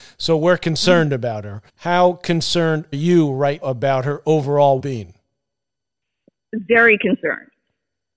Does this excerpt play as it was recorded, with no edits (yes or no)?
no